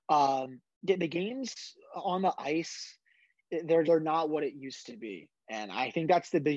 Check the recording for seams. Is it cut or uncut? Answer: cut